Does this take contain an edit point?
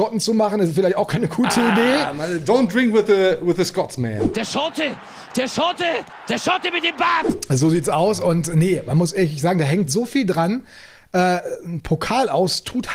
no; 0 cuts

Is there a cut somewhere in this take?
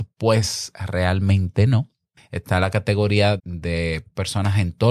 yes; 2 cuts; at 2.2 s, 3.4 s

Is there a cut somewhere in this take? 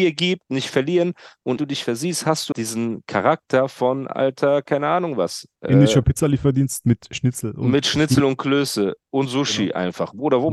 yes; 2 cuts; at 1.6 s, 2.5 s

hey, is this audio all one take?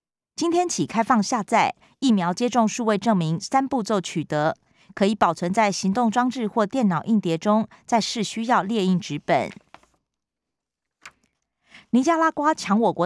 yes; 0 cuts

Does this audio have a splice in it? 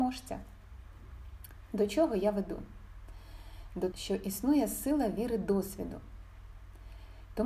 yes; 1 cut; at 3.9 s

